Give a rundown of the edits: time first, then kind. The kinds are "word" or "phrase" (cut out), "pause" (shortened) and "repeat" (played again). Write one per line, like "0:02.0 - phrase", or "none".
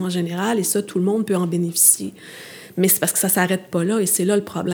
none